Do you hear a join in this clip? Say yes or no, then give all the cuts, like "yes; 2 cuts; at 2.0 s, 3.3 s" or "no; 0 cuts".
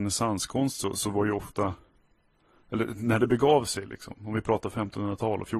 no; 0 cuts